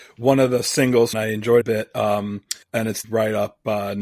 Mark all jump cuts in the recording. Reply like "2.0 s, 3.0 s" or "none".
1.1 s, 1.6 s, 2.6 s, 3.0 s